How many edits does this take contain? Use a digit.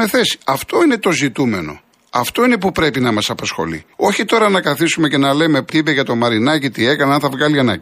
2